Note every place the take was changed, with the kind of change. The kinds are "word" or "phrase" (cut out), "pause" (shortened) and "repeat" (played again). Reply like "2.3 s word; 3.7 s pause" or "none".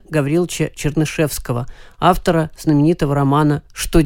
none